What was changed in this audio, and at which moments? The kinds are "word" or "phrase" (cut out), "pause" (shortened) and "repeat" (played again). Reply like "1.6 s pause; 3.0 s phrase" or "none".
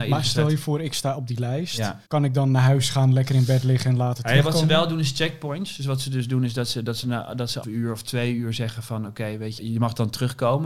2.0 s pause; 7.6 s word; 9.6 s word